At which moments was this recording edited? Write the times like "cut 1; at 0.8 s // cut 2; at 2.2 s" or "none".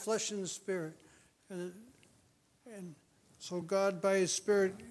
none